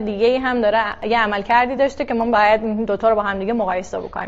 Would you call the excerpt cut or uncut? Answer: uncut